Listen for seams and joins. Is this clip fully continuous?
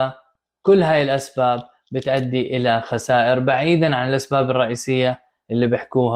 yes; 0 cuts

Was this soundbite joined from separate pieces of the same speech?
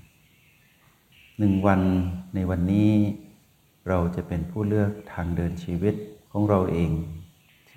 no; 0 cuts

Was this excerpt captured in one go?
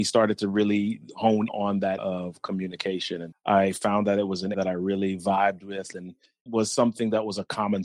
no; 6 cuts; at 1.5 s, 2.0 s, 3.3 s, 4.5 s, 5.9 s, 6.5 s

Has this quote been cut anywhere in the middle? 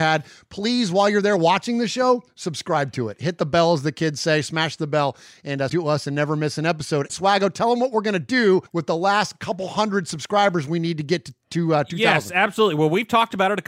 yes; 3 cuts; at 5.7 s, 7.1 s, 8.7 s

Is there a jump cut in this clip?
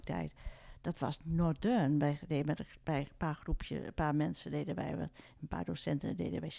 no; 0 cuts

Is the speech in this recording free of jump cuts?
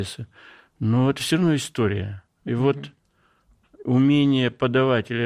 yes; 0 cuts

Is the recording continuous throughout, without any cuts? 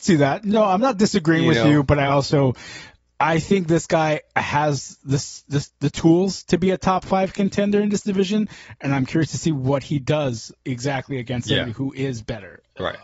yes; 0 cuts

